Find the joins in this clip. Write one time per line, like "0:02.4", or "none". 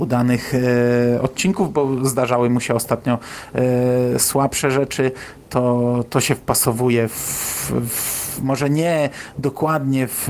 none